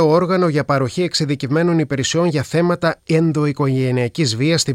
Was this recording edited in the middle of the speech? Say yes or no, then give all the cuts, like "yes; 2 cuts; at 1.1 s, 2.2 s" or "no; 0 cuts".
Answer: yes; 1 cut; at 3.0 s